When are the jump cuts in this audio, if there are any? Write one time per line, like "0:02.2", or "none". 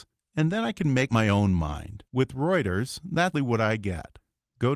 0:01.1
0:02.1
0:03.3